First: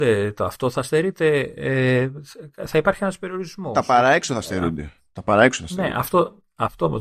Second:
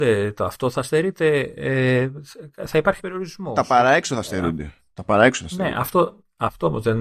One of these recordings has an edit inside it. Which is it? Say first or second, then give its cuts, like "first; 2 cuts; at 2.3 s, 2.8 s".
second; 1 cut; at 3.0 s